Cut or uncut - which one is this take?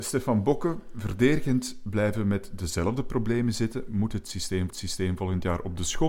cut